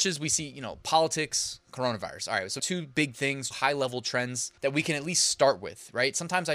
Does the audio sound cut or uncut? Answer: cut